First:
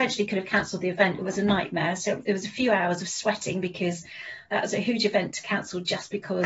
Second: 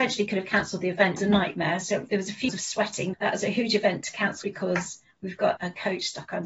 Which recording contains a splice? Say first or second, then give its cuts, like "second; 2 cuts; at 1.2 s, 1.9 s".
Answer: second; 5 cuts; at 1.2 s, 2.5 s, 3.1 s, 4.4 s, 5.6 s